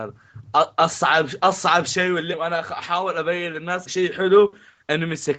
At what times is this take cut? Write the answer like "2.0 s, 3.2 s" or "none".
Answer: 2.3 s, 3.9 s